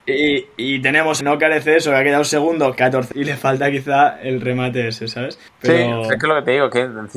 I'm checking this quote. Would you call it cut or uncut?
cut